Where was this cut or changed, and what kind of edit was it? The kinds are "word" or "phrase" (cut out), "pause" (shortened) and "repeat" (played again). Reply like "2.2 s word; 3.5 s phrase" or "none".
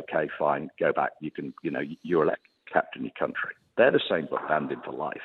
1.2 s word; 2.3 s word; 4.3 s word